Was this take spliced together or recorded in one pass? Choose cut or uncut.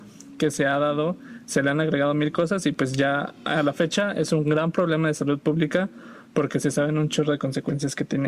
uncut